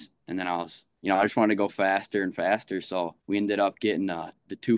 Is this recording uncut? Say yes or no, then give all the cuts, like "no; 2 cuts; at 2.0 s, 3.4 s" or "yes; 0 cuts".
no; 2 cuts; at 1.0 s, 3.2 s